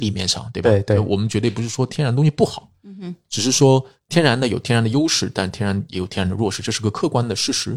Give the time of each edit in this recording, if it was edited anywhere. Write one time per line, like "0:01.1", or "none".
none